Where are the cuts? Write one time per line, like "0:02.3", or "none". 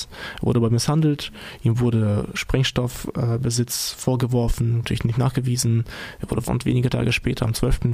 0:04.8
0:06.5